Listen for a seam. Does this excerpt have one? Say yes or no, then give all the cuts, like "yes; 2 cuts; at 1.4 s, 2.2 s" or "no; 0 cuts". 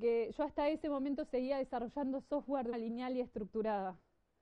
yes; 1 cut; at 2.7 s